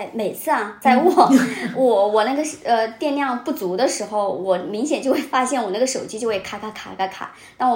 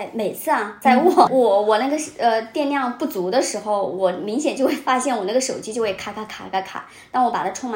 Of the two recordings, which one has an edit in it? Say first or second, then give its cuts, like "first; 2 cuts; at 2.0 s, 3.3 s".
second; 1 cut; at 1.3 s